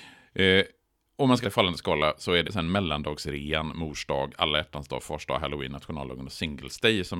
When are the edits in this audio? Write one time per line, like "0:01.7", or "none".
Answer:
0:01.4
0:02.4